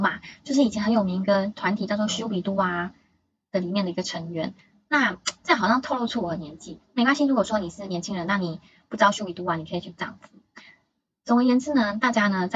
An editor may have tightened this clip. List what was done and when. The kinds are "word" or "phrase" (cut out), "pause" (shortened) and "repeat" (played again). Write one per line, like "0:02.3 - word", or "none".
0:10.0 - word